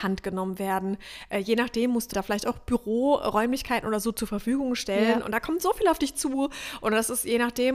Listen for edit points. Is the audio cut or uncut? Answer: cut